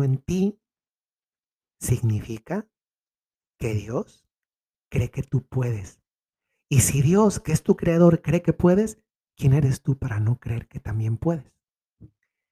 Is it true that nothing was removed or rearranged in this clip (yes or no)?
yes